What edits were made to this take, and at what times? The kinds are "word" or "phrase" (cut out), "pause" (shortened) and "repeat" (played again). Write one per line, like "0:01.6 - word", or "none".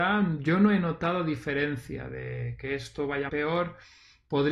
0:03.3 - word